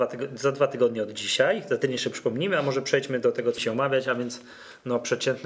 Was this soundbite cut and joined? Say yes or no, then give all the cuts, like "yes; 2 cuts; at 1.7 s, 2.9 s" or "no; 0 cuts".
yes; 1 cut; at 3.6 s